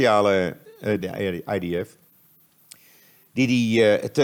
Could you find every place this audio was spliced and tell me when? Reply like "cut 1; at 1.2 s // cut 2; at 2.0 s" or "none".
cut 1; at 1.0 s